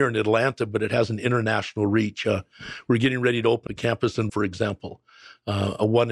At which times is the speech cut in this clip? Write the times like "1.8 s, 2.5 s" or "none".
3.7 s, 4.3 s